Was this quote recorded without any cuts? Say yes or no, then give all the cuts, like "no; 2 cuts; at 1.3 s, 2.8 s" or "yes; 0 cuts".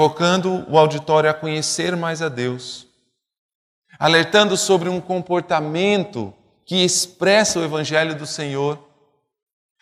yes; 0 cuts